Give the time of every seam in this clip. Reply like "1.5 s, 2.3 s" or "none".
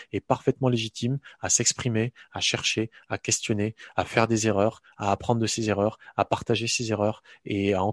none